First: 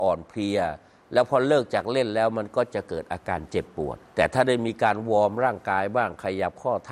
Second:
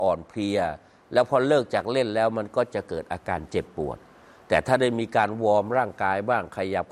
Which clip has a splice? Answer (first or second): first